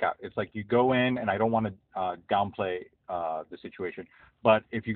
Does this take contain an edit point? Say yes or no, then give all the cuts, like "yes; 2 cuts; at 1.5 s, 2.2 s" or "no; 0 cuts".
no; 0 cuts